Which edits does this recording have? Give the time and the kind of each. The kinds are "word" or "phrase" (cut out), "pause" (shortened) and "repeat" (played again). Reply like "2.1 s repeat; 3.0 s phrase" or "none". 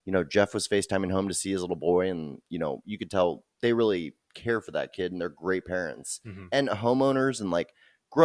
3.5 s pause; 4.2 s pause